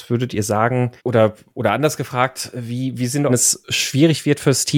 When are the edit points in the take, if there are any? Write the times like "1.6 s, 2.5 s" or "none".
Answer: 1.0 s, 3.3 s